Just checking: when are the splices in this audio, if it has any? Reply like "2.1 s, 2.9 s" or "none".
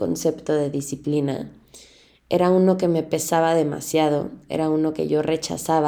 none